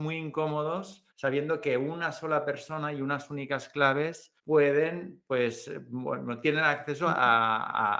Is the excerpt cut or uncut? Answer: cut